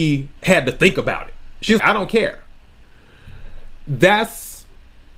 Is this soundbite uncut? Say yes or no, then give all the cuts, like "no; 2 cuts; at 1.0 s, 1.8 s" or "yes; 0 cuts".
no; 1 cut; at 1.8 s